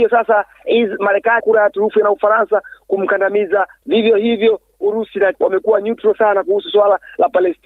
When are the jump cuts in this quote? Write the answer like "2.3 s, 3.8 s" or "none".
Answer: 1.4 s, 2.0 s, 3.8 s, 5.3 s